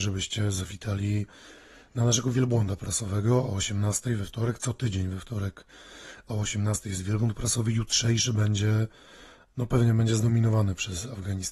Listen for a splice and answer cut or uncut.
uncut